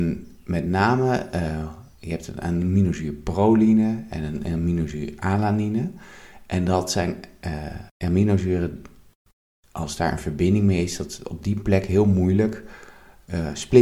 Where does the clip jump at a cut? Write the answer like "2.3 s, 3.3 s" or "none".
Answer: 7.9 s